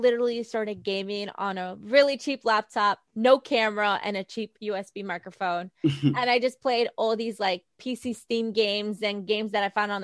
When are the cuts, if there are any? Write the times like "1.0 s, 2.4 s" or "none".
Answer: 3.1 s

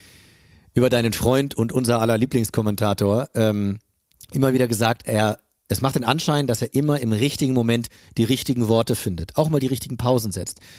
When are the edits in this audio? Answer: none

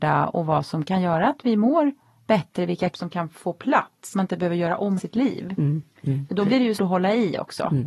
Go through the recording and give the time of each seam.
2.9 s, 4.1 s, 5.0 s, 6.8 s

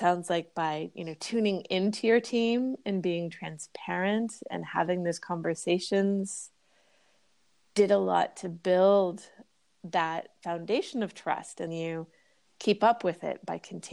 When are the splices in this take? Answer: 11.7 s

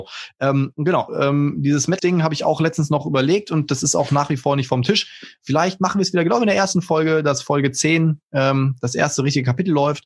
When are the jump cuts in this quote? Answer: 1.1 s, 2.0 s

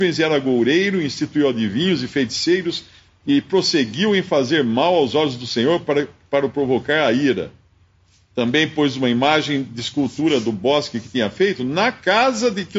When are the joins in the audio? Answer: none

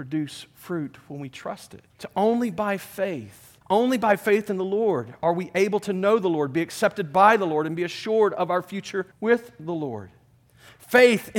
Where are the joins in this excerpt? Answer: 1.9 s, 3.6 s, 9.1 s

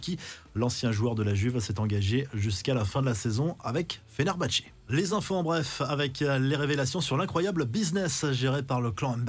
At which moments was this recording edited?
none

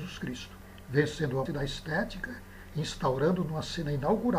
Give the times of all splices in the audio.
1.5 s

